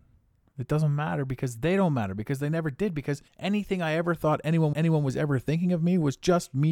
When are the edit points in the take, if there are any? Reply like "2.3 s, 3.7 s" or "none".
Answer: 3.3 s, 4.7 s